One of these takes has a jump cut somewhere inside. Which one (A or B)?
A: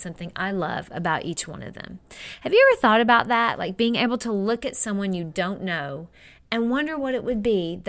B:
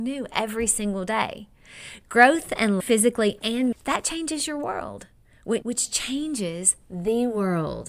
B